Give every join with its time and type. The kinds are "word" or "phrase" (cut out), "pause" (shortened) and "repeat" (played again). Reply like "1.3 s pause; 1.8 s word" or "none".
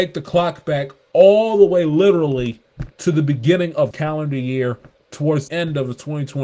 2.9 s pause; 3.9 s word; 5.5 s word